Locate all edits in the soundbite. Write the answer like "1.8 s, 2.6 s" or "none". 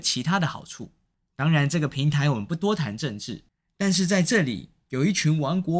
none